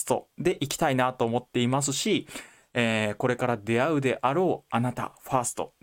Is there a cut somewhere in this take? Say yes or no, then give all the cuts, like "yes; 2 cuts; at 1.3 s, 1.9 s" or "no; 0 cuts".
no; 0 cuts